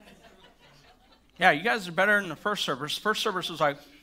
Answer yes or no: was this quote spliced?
no